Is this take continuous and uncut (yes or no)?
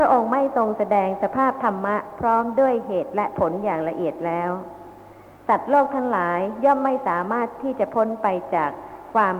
yes